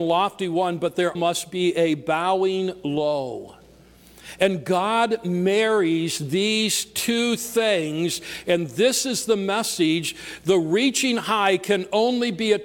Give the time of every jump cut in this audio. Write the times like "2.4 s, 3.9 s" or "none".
1.1 s